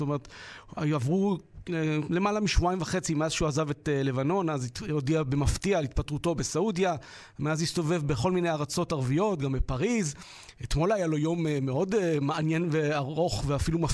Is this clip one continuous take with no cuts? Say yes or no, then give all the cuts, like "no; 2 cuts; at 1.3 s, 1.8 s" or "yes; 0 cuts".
yes; 0 cuts